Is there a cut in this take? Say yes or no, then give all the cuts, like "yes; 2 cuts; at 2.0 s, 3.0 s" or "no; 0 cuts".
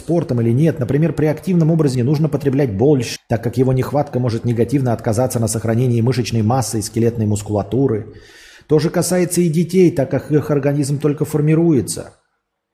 yes; 2 cuts; at 1.9 s, 3.2 s